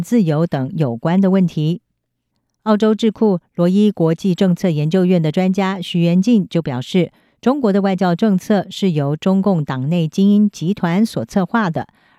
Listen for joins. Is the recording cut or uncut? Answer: uncut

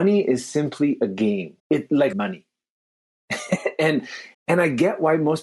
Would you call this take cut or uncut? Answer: cut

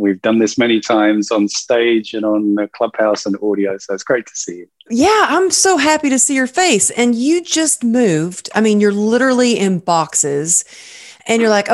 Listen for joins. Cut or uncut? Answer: uncut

